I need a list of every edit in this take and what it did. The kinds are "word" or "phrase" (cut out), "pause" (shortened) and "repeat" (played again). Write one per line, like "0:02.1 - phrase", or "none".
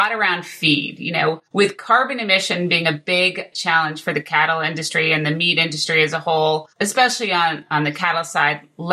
0:01.5 - pause
0:06.7 - pause